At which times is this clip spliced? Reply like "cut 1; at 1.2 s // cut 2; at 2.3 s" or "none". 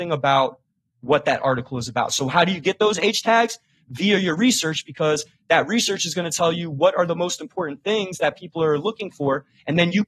none